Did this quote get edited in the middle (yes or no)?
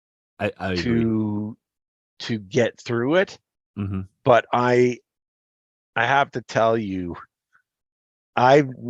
no